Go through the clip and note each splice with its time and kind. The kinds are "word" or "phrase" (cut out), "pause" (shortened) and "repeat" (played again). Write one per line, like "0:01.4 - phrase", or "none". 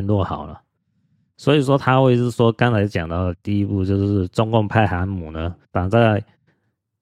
0:05.6 - pause

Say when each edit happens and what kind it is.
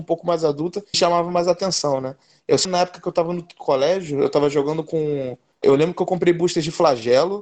0:00.9 - word
0:02.6 - phrase
0:05.6 - word

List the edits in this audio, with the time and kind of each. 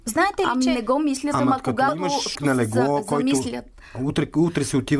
0:02.3 - word

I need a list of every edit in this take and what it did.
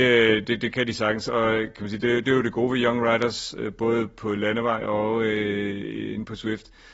none

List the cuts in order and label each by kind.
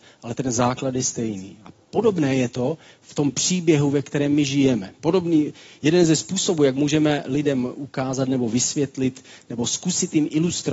none

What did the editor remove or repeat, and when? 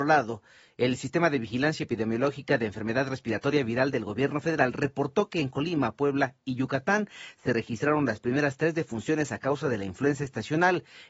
none

